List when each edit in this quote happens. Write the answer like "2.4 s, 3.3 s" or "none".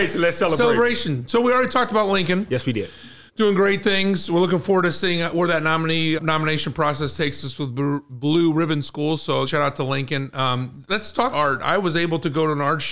3.3 s, 6.2 s, 9.5 s, 11.3 s